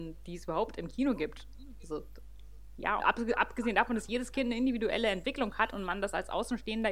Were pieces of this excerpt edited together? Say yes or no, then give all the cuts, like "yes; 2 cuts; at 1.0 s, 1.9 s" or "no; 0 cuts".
yes; 1 cut; at 3.0 s